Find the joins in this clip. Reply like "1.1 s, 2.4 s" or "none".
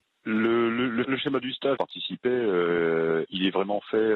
1.0 s, 1.8 s